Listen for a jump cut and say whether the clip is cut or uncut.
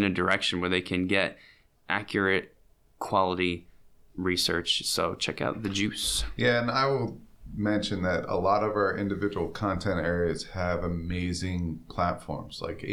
uncut